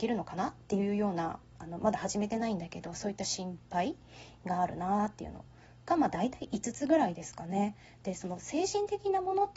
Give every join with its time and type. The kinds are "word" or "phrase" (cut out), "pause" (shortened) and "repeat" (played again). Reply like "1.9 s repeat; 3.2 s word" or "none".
none